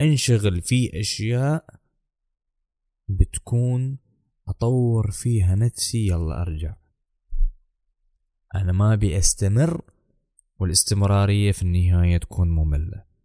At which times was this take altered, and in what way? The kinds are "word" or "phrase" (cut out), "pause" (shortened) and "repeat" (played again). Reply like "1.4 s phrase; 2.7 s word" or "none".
none